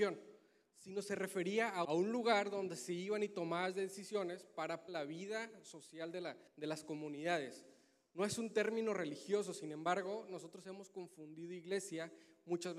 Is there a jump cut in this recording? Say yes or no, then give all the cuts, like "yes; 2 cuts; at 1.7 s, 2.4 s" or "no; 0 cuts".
yes; 3 cuts; at 1.8 s, 4.9 s, 6.5 s